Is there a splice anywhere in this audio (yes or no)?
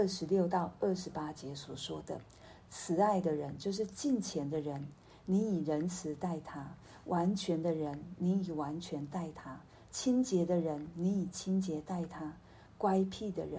no